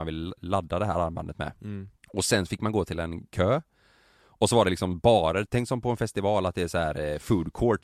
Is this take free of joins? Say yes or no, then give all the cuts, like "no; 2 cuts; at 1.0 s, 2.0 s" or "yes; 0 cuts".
no; 2 cuts; at 2.0 s, 5.5 s